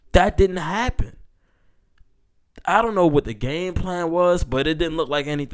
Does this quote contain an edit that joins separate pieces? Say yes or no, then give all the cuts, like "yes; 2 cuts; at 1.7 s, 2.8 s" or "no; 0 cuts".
no; 0 cuts